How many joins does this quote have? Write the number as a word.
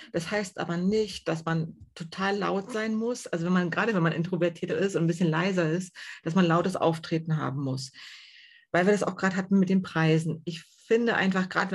one